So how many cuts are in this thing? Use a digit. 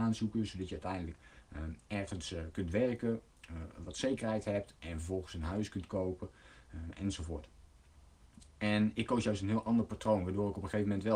0